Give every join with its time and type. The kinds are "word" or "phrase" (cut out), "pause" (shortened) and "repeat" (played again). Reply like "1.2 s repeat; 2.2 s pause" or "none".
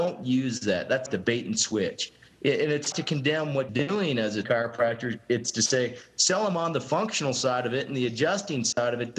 1.1 s word; 2.9 s word; 3.7 s word; 4.4 s word